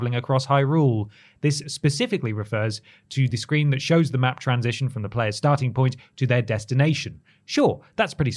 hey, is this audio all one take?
yes; 0 cuts

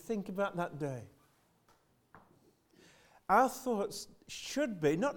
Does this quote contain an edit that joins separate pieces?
no; 0 cuts

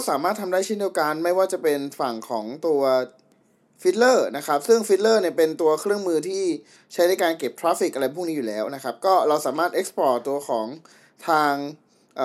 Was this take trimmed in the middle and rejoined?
no; 0 cuts

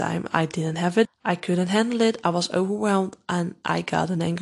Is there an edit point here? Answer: yes; 1 cut; at 1.0 s

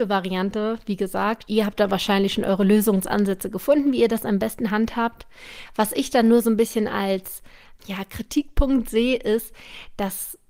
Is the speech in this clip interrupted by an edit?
yes; 2 cuts; at 1.5 s, 7.8 s

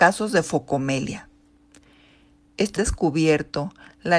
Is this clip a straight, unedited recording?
no; 1 cut; at 2.8 s

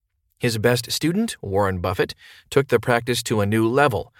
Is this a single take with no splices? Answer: yes; 0 cuts

